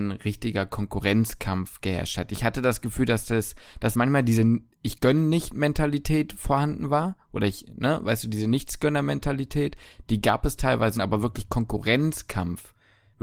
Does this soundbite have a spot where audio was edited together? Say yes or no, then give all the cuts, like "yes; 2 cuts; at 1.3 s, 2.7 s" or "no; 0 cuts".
yes; 2 cuts; at 3.9 s, 11.0 s